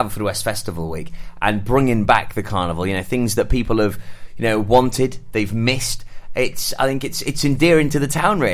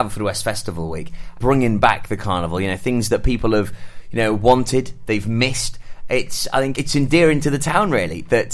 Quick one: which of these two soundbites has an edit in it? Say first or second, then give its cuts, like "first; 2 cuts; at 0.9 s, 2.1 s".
second; 2 cuts; at 1.4 s, 6.8 s